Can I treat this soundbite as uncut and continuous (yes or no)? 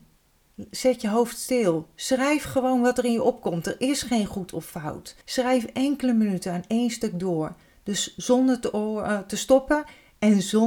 no